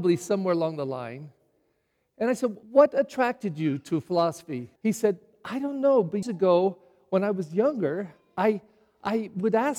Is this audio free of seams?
no; 3 cuts; at 2.6 s, 4.8 s, 6.2 s

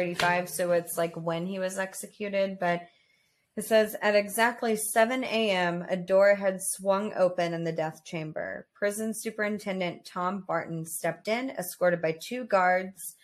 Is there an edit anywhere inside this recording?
no; 0 cuts

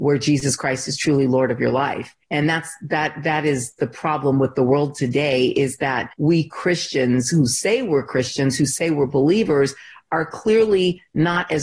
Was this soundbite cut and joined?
yes; 2 cuts; at 2.2 s, 6.1 s

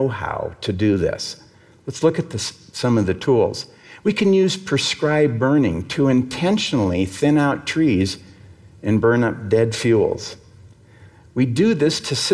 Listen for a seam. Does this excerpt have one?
no; 0 cuts

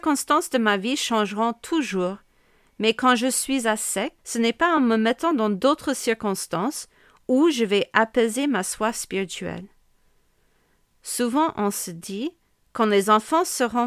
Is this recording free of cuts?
yes; 0 cuts

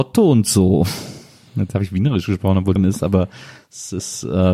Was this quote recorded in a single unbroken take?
no; 1 cut; at 2.8 s

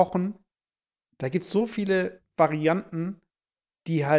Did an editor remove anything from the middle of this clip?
no; 0 cuts

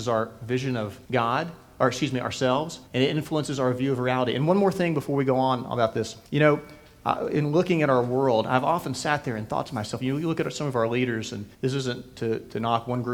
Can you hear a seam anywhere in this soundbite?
yes; 4 cuts; at 1.0 s, 2.9 s, 6.3 s, 11.5 s

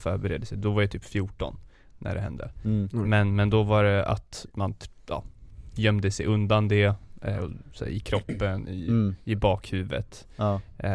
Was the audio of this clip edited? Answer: no; 0 cuts

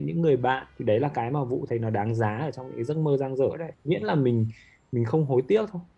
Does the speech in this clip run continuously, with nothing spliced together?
yes; 0 cuts

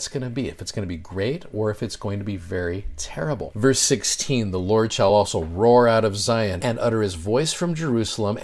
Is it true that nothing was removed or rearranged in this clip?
yes; 0 cuts

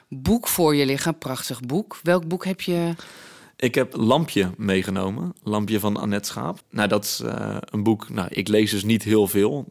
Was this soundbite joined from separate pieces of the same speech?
yes; 1 cut; at 6.6 s

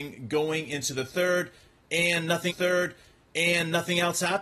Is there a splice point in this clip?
yes; 1 cut; at 2.5 s

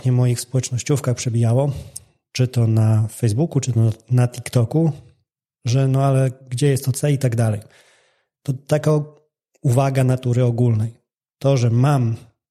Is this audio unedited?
yes; 0 cuts

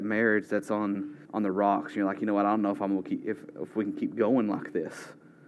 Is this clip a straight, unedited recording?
no; 1 cut; at 1.2 s

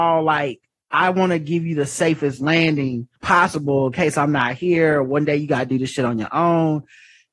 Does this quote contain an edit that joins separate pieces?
yes; 1 cut; at 3.1 s

